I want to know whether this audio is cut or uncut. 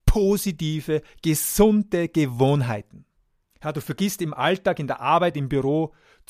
uncut